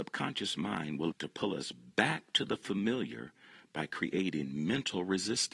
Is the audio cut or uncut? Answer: cut